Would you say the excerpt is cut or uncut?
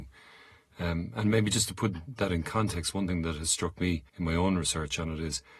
cut